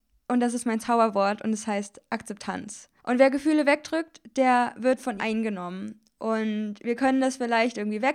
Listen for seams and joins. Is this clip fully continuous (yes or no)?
no